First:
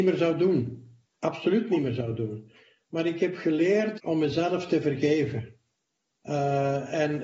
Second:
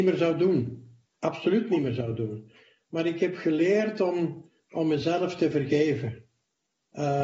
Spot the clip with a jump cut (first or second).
first